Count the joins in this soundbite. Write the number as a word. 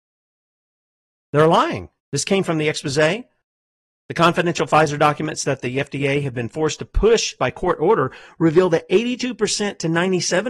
two